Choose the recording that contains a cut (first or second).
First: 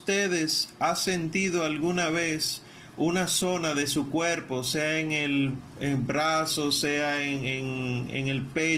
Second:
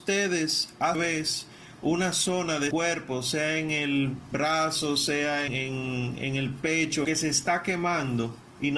second